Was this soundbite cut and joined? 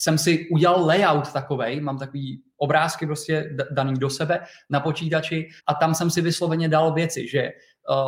yes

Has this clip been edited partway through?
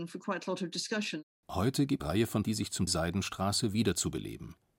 yes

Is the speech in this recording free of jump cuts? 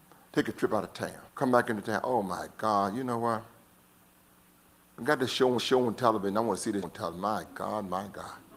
no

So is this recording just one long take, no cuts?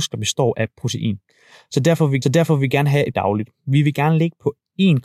no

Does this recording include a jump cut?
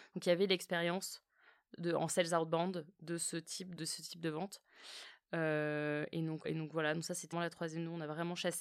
yes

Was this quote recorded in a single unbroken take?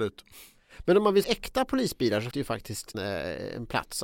no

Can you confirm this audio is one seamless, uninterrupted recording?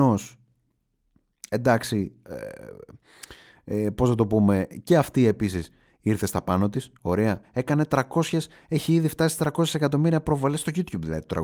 yes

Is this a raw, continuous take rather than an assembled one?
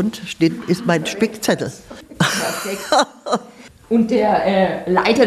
yes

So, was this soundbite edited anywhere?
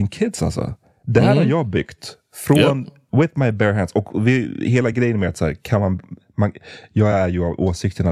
no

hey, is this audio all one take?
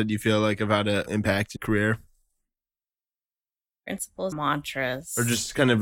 no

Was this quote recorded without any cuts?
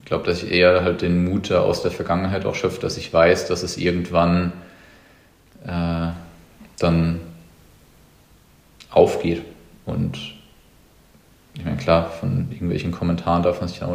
yes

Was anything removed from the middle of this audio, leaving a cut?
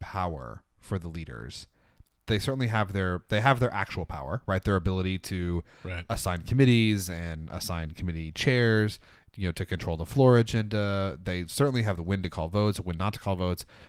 no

